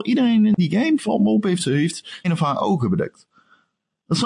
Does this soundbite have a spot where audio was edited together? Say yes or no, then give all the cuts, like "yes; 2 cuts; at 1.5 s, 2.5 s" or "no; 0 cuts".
yes; 1 cut; at 2.2 s